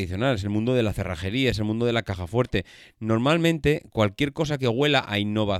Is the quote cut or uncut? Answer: uncut